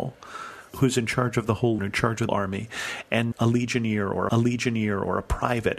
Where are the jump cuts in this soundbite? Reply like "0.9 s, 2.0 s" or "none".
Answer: 1.8 s, 2.3 s, 3.3 s, 4.3 s